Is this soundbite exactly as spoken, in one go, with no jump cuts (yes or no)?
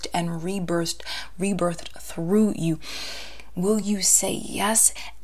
yes